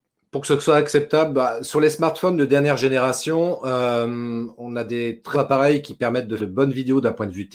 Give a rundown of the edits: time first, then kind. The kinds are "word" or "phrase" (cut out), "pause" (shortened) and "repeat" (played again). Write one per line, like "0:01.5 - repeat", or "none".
0:05.3 - word
0:06.4 - word